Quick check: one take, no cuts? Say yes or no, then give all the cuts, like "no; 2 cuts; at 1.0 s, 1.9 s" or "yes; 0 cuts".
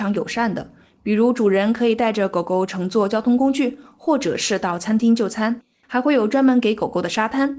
yes; 0 cuts